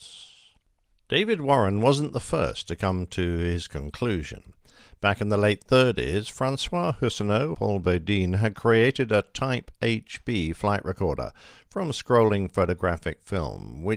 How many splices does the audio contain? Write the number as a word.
one